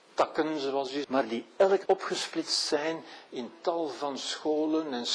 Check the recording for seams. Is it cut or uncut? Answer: cut